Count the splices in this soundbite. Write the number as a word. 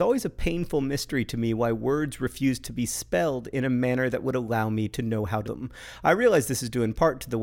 one